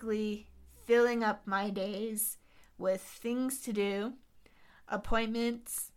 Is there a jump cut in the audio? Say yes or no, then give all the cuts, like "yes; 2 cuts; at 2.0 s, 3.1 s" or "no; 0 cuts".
no; 0 cuts